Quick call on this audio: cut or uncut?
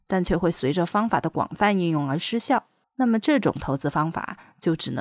cut